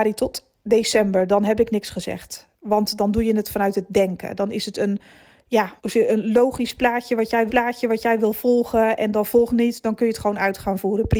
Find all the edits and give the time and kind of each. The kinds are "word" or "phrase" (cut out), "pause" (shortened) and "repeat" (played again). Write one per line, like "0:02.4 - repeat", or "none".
0:05.8 - pause
0:07.5 - repeat
0:09.5 - phrase